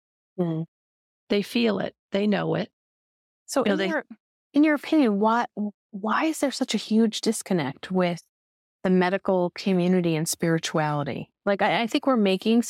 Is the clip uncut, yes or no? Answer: no